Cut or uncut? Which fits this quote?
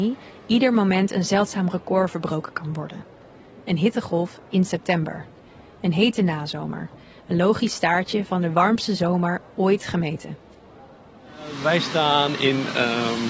uncut